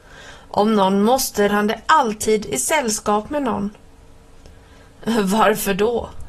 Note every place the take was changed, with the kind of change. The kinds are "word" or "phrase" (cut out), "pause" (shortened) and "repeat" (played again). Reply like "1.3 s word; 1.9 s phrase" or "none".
1.5 s phrase